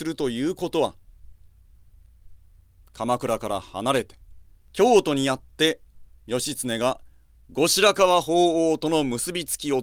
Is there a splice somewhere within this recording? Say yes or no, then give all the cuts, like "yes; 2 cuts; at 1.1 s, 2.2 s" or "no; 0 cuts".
yes; 1 cut; at 4.6 s